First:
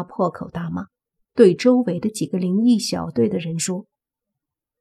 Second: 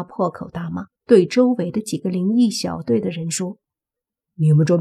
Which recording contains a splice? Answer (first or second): second